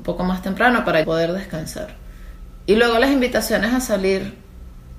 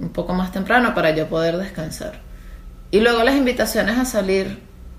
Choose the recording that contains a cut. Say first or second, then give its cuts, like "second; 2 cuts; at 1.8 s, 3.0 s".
first; 1 cut; at 1.0 s